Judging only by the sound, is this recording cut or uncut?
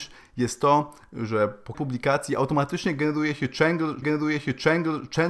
cut